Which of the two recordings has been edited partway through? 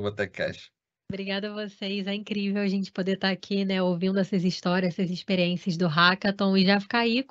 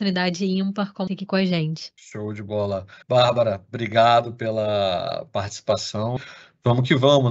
second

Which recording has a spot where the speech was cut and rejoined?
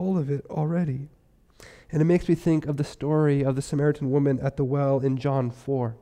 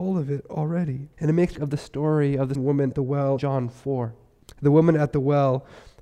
second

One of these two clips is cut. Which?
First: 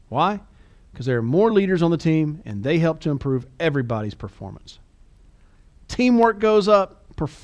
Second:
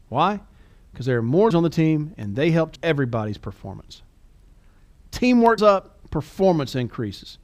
second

